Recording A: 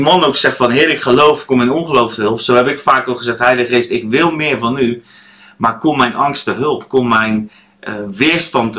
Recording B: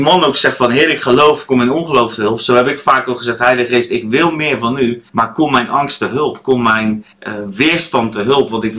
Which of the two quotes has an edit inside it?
B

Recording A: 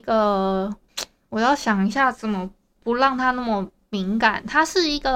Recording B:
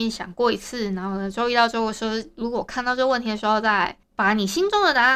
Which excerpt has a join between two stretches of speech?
B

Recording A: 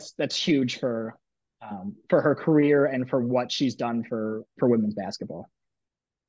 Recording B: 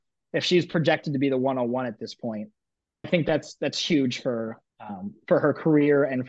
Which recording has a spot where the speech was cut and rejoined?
B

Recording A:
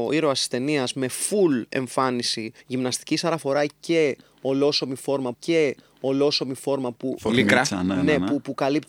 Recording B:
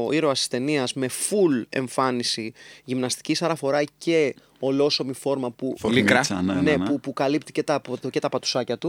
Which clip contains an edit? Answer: A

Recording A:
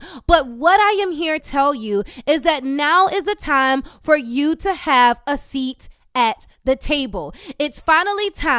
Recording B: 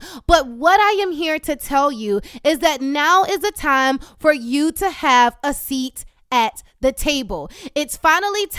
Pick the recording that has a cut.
A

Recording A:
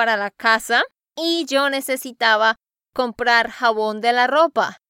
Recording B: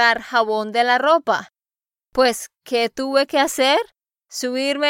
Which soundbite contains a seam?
A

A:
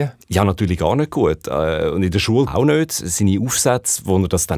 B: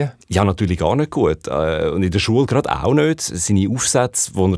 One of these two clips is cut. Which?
A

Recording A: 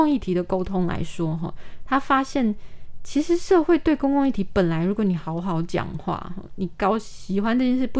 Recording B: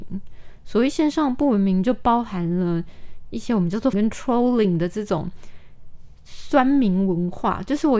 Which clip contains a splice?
B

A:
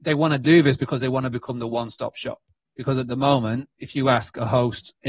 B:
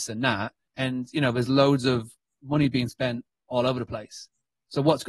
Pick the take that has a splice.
A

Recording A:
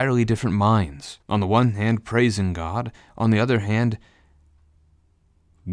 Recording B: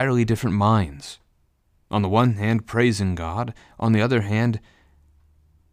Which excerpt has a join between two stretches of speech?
A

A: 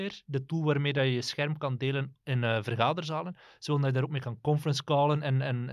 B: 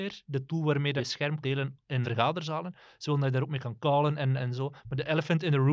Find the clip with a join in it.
B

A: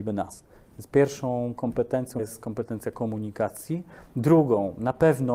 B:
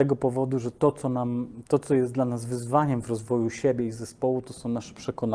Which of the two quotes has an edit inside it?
A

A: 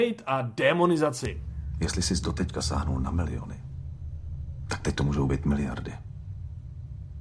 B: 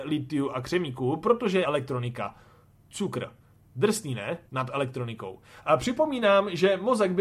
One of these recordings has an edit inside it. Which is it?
B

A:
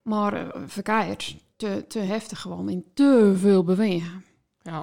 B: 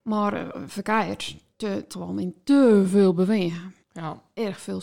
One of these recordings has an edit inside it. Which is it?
B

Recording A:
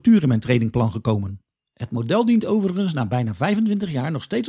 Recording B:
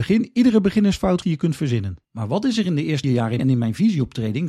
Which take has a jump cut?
B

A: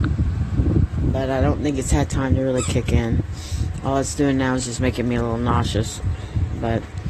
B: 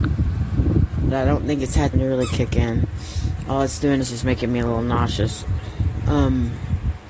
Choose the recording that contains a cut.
B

